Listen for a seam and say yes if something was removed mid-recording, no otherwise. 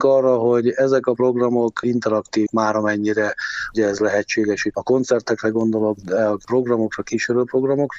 yes